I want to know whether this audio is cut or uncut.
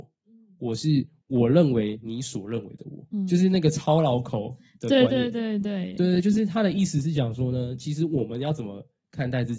cut